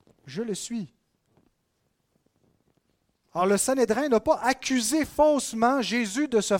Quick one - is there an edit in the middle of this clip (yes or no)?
no